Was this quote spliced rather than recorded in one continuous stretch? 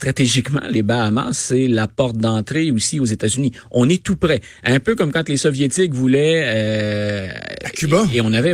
no; 0 cuts

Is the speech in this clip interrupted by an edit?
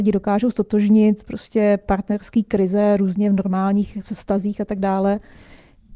no; 0 cuts

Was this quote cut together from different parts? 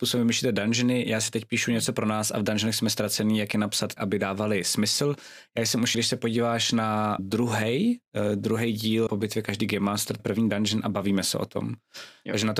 yes; 5 cuts; at 4.0 s, 5.9 s, 7.2 s, 9.1 s, 10.2 s

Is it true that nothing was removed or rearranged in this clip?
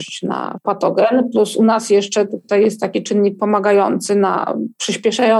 yes; 0 cuts

